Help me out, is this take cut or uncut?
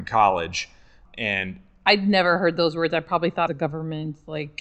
cut